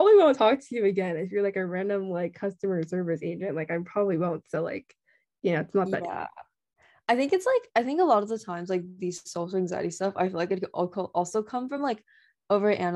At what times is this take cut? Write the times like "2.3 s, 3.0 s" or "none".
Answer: none